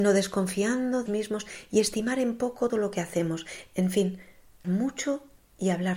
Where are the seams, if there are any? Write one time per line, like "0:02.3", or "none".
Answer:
0:01.1
0:02.7
0:04.6